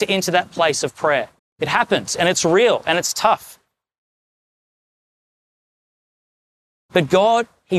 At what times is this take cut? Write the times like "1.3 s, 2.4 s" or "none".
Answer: 1.4 s